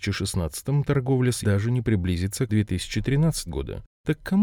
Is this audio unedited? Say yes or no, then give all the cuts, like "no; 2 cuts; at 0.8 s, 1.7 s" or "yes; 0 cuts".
no; 3 cuts; at 1.4 s, 2.5 s, 3.5 s